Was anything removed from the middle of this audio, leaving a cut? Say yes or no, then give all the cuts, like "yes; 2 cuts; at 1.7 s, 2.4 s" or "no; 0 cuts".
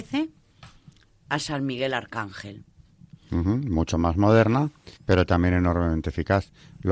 yes; 1 cut; at 5.0 s